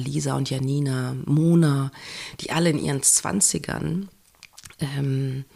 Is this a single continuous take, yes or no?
yes